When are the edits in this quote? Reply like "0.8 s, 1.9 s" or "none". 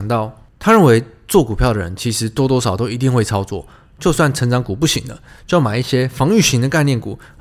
none